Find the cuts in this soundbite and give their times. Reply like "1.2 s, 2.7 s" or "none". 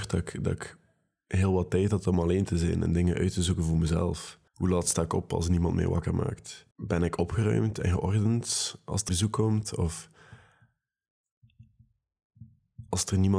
4.5 s, 6.7 s, 9.1 s